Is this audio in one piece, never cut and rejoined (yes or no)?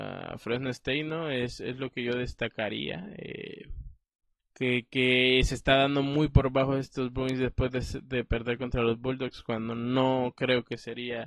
no